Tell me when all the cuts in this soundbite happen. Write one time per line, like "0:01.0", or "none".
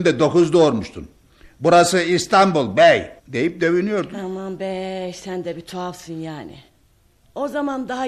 0:03.2